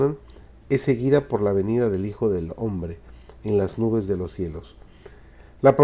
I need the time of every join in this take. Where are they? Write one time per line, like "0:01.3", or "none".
none